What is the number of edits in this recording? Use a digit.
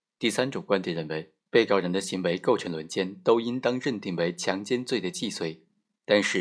1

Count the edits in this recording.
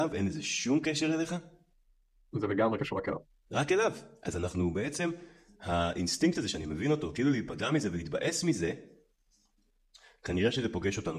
0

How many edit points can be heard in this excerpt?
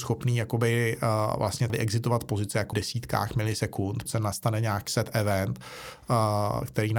4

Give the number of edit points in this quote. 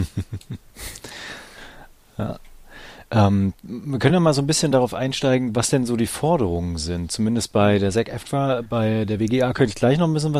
0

